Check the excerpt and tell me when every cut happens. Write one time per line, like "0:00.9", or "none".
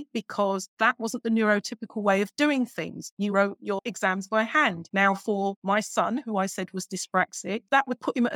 0:03.3